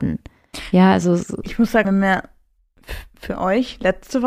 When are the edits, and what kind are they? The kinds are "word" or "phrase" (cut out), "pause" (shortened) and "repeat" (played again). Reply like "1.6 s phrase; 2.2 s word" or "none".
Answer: 1.8 s phrase